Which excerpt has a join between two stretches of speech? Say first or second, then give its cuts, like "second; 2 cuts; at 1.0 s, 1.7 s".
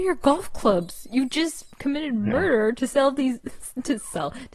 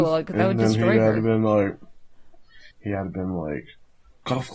second; 1 cut; at 2.7 s